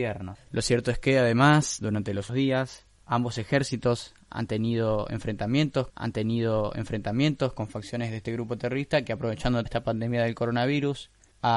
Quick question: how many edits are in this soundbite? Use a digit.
3